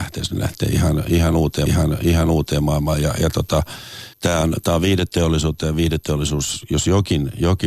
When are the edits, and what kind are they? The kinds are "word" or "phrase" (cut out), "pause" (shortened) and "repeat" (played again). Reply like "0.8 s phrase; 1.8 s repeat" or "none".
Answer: 1.7 s repeat; 4.1 s pause